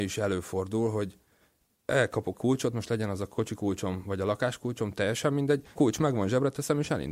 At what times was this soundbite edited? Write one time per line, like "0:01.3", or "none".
0:02.3
0:05.8